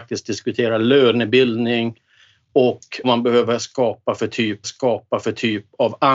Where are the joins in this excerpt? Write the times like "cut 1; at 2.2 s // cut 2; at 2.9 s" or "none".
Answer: cut 1; at 3.0 s // cut 2; at 4.6 s

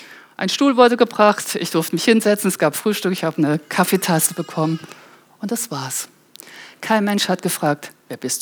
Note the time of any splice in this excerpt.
none

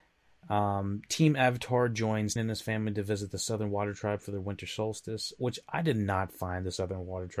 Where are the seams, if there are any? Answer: cut 1; at 2.4 s

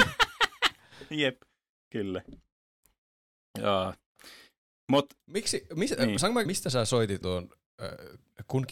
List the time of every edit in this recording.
cut 1; at 6.5 s // cut 2; at 7.2 s

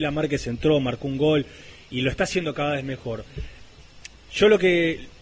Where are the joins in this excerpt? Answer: none

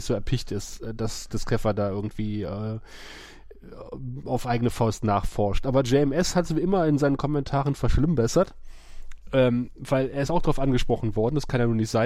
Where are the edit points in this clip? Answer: none

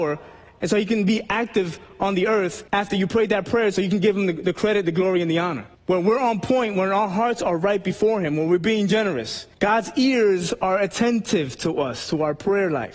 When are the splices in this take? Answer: cut 1; at 2.7 s // cut 2; at 5.7 s // cut 3; at 9.5 s

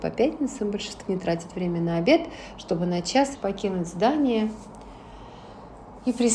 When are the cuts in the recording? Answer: cut 1; at 1.1 s // cut 2; at 3.3 s

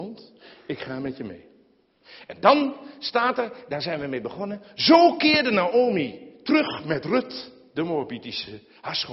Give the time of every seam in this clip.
none

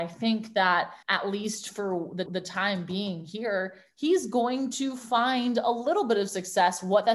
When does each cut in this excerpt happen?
cut 1; at 1.0 s // cut 2; at 2.3 s

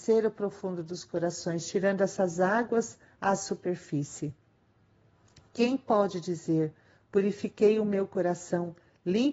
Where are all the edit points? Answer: none

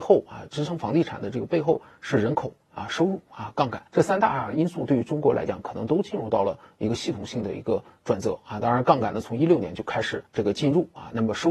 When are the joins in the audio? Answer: cut 1; at 3.9 s // cut 2; at 10.3 s

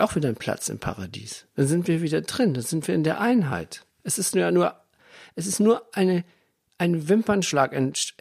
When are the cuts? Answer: cut 1; at 3.9 s

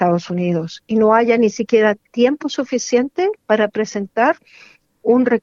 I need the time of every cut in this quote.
none

